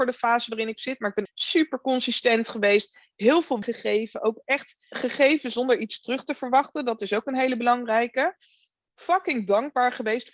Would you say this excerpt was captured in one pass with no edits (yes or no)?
no